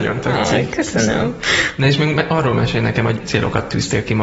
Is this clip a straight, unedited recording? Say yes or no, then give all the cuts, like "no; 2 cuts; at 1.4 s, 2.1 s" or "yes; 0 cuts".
no; 1 cut; at 3.2 s